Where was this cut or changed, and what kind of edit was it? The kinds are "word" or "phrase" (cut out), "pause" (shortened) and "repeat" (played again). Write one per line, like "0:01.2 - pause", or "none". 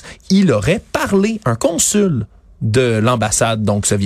0:01.4 - word

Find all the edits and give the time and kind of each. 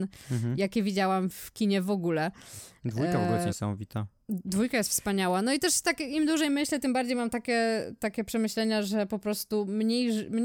0:01.3 - word

